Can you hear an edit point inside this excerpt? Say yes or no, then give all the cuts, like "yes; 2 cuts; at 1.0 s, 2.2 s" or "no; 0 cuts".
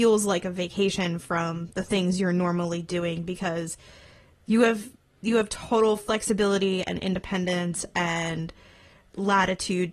no; 0 cuts